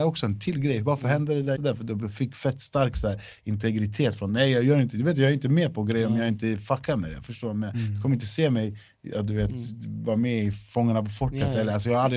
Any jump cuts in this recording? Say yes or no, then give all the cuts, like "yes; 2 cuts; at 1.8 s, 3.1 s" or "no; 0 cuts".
yes; 1 cut; at 1.5 s